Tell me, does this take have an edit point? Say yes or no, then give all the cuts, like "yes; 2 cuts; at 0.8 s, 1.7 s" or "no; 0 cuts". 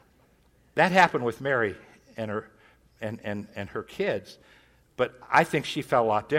no; 0 cuts